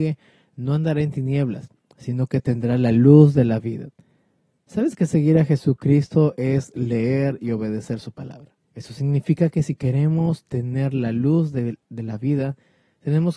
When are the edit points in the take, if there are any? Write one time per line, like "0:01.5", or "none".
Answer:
0:08.6